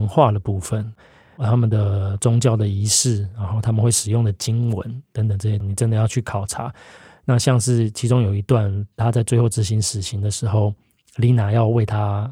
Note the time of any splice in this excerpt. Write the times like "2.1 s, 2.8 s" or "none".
none